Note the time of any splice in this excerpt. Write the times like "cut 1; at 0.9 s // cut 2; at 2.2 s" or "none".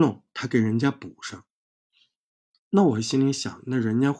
none